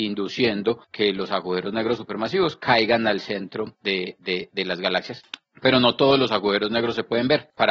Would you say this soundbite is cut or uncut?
uncut